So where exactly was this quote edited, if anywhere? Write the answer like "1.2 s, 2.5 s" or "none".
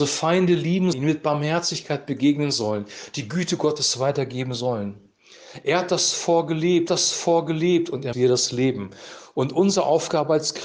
0.9 s, 6.9 s, 8.1 s